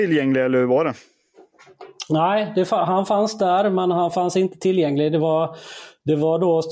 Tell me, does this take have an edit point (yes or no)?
no